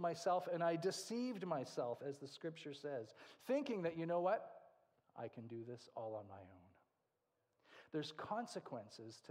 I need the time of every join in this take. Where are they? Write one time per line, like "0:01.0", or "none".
none